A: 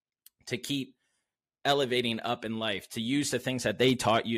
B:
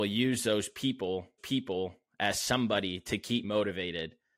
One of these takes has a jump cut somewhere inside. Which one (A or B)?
B